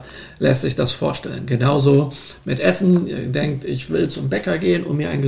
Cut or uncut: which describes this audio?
uncut